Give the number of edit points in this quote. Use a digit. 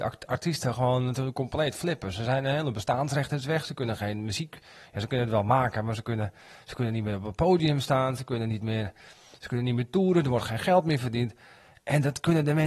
0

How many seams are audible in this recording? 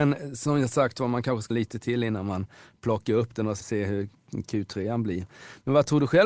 2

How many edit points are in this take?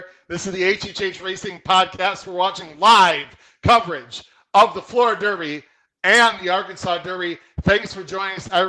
0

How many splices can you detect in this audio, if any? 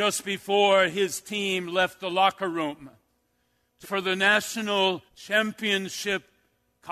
2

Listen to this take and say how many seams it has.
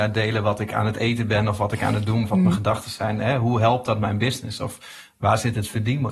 1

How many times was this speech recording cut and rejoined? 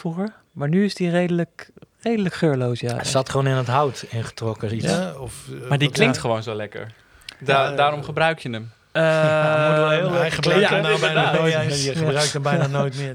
0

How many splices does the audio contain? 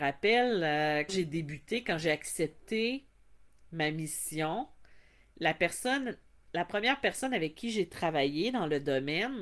1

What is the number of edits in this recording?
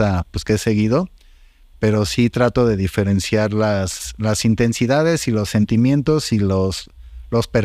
0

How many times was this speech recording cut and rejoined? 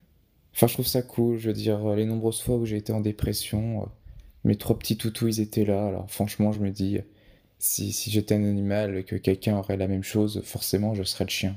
0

